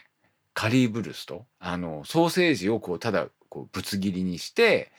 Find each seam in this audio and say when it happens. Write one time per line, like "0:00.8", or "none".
0:01.5